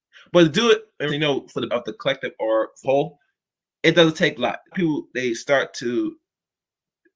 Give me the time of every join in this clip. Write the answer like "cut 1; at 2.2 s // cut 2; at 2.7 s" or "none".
cut 1; at 1.1 s // cut 2; at 1.7 s // cut 3; at 2.8 s // cut 4; at 4.4 s // cut 5; at 4.7 s